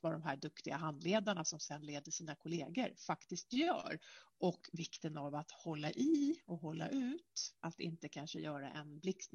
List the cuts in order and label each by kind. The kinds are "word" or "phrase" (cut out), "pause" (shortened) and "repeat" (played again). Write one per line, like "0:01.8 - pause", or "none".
0:07.6 - pause